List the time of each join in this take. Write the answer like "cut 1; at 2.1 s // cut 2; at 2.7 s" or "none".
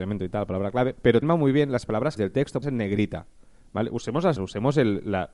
cut 1; at 1.2 s // cut 2; at 2.2 s // cut 3; at 2.6 s // cut 4; at 4.4 s